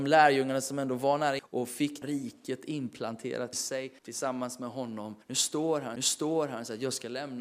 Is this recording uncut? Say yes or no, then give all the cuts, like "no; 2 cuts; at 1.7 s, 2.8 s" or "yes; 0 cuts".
no; 6 cuts; at 1.4 s, 2.0 s, 3.5 s, 4.0 s, 5.2 s, 6.0 s